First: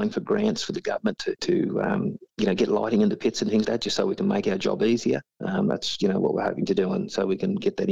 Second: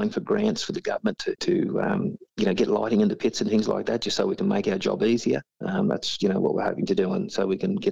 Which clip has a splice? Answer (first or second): first